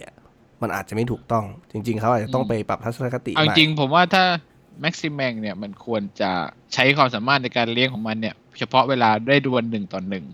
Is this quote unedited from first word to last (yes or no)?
no